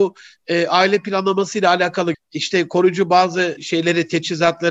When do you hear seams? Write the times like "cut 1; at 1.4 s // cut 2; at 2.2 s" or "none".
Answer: cut 1; at 2.1 s